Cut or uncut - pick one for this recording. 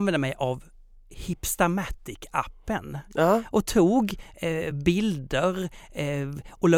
uncut